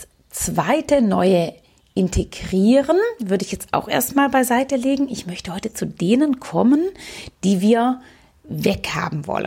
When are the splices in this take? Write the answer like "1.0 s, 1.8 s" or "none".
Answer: none